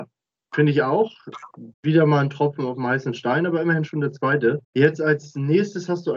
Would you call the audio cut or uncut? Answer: cut